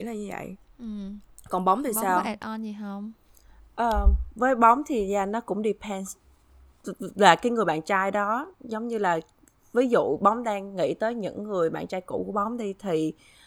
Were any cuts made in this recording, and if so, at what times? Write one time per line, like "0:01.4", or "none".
none